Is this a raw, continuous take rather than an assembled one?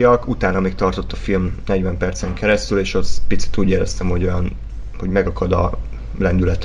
yes; 0 cuts

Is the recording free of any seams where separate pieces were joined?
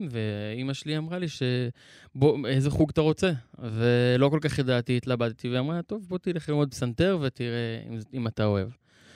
yes; 0 cuts

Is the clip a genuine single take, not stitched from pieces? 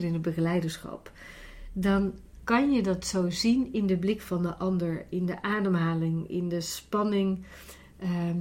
yes; 0 cuts

